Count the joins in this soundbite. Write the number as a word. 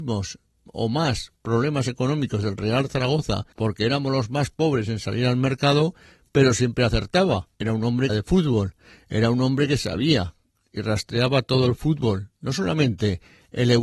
three